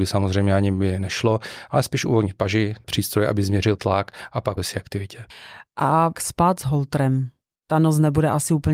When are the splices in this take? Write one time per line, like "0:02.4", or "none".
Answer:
0:02.8
0:03.8
0:04.6
0:06.1